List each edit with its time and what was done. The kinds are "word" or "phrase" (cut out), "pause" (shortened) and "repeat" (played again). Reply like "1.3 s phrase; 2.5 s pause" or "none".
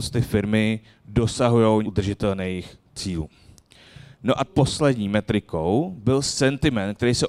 1.8 s word; 4.5 s word